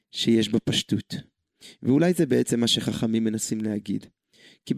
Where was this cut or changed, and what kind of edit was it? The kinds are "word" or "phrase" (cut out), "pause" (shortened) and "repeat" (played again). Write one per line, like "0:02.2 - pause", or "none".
none